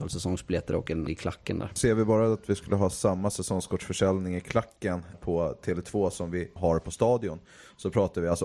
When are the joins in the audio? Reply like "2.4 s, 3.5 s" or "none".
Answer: 1.1 s, 5.1 s, 6.6 s